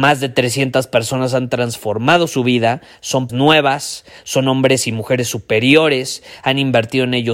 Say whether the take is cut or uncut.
cut